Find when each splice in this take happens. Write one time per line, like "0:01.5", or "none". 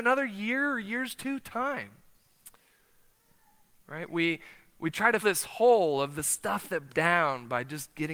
0:05.2
0:06.9